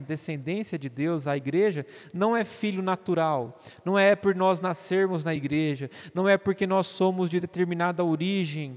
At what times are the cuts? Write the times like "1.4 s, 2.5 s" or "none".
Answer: none